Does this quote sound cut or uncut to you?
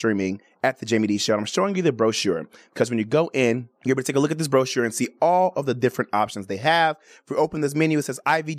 cut